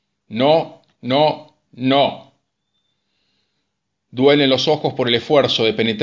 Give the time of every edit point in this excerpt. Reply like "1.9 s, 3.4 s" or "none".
none